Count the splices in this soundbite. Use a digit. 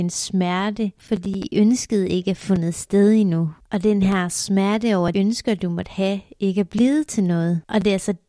1